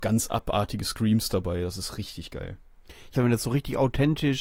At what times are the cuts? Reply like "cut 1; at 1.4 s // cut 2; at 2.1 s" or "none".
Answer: cut 1; at 3.1 s

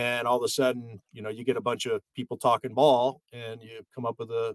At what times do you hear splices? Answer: none

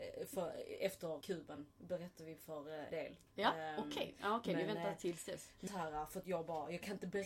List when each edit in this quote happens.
cut 1; at 1.2 s // cut 2; at 2.9 s // cut 3; at 5.7 s

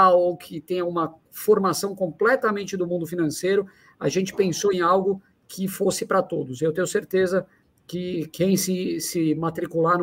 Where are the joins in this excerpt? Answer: none

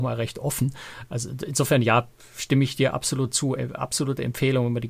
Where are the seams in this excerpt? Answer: none

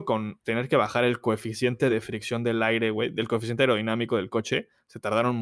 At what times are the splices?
none

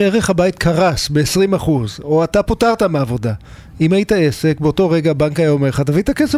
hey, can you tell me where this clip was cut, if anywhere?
none

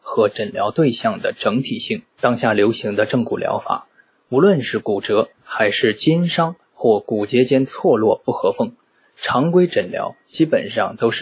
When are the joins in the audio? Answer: cut 1; at 2.1 s // cut 2; at 5.3 s

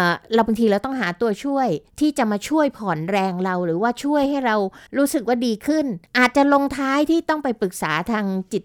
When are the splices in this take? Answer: cut 1; at 4.9 s // cut 2; at 6.1 s

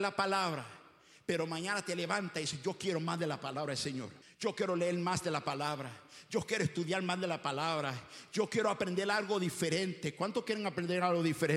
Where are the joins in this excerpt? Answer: cut 1; at 4.2 s

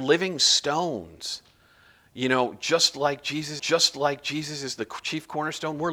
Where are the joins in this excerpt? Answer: cut 1; at 3.6 s

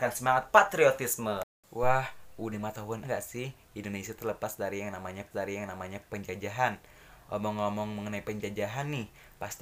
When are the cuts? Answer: cut 1; at 2.5 s // cut 2; at 3.0 s // cut 3; at 5.3 s

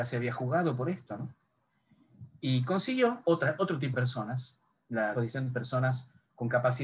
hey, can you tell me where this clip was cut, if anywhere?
cut 1; at 3.2 s // cut 2; at 3.9 s // cut 3; at 5.1 s

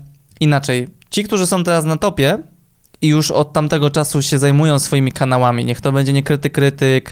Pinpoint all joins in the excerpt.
none

